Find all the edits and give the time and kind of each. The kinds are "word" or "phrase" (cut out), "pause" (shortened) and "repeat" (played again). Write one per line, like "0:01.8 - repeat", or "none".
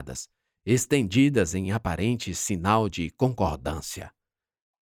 none